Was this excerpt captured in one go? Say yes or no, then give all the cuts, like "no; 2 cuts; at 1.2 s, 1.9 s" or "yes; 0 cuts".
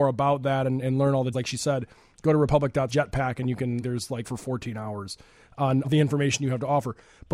no; 5 cuts; at 1.3 s, 2.9 s, 3.8 s, 4.2 s, 5.8 s